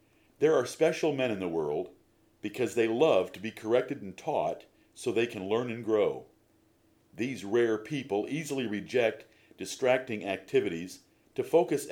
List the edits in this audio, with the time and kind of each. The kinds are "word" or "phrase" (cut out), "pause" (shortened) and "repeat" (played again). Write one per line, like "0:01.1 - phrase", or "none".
none